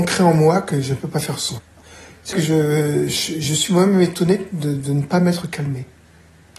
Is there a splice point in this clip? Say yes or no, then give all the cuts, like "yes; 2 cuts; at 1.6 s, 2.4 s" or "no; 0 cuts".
yes; 1 cut; at 2.3 s